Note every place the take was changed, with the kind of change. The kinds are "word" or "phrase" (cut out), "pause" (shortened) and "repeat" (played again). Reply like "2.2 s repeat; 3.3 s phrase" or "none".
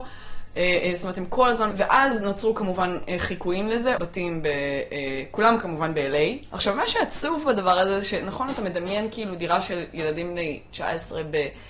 1.7 s word; 4.0 s word